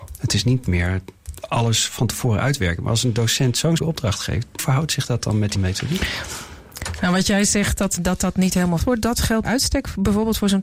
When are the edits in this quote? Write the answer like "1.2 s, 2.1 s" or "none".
3.8 s, 4.6 s, 5.5 s, 8.0 s, 8.8 s, 9.4 s